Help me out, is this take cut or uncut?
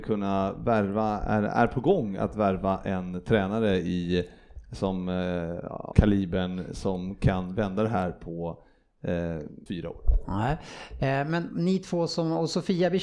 cut